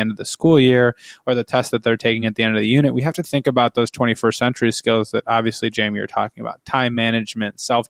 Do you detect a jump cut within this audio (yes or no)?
no